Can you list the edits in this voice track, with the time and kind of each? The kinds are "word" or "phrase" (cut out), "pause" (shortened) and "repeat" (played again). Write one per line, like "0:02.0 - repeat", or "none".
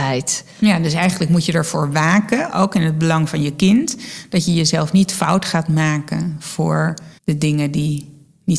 0:07.2 - pause

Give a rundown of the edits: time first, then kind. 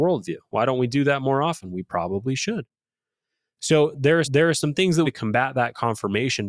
0:04.2 - repeat
0:05.0 - phrase

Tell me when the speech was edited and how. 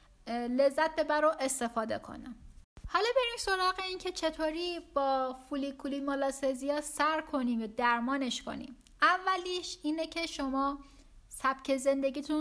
none

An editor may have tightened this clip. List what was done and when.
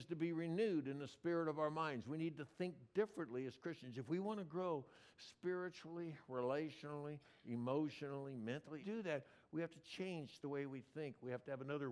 0:08.8 - phrase

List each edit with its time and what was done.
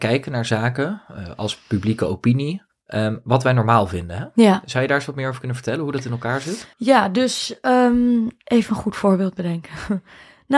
0:02.7 - pause
0:06.7 - pause

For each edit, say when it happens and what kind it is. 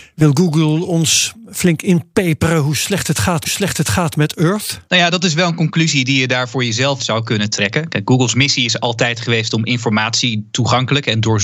0:03.4 - repeat
0:04.9 - pause
0:07.0 - word

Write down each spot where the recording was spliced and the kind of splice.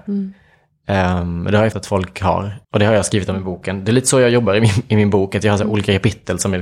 0:01.7 - word
0:02.6 - pause

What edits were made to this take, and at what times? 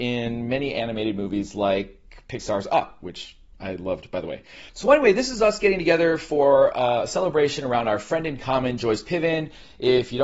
none

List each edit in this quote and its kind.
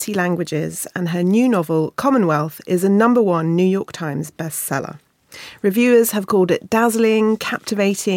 none

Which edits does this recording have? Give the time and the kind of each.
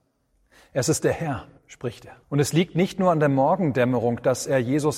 0:01.6 - pause
0:02.2 - pause

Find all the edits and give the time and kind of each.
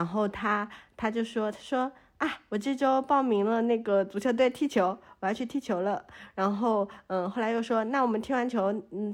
none

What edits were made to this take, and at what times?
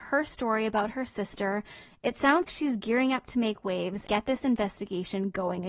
0:02.4 - word
0:04.1 - word

